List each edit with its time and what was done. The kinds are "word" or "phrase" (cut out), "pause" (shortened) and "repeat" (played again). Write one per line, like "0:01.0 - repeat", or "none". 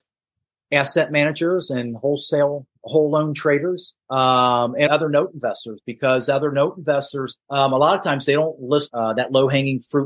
0:04.0 - pause
0:04.9 - word
0:07.4 - pause
0:08.9 - phrase